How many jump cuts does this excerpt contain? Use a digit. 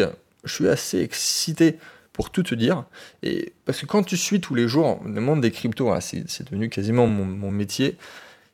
0